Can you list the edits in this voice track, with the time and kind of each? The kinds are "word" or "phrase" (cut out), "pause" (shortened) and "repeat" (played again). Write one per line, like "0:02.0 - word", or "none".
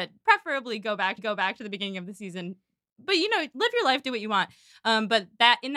0:01.2 - repeat